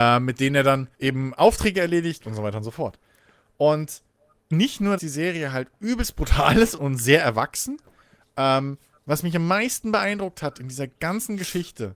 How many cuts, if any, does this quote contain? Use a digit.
6